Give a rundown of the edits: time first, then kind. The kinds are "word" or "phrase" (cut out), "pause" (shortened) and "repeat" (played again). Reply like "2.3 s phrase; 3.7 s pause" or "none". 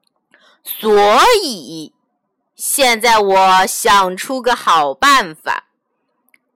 none